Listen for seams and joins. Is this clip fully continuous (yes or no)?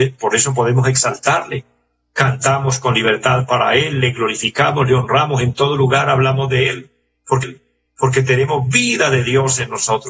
no